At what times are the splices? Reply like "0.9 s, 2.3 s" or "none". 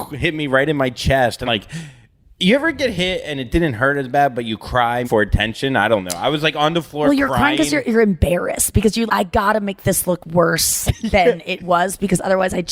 1.5 s, 5.0 s, 9.1 s